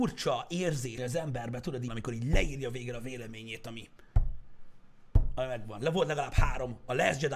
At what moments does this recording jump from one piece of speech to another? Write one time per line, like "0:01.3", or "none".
0:01.0
0:01.9